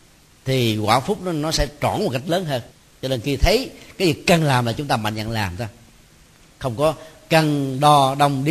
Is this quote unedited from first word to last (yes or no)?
no